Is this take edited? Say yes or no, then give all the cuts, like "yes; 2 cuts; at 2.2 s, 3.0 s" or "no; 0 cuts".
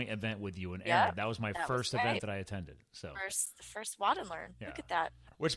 no; 0 cuts